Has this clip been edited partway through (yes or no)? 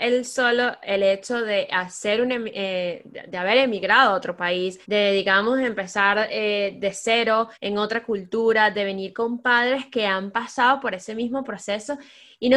yes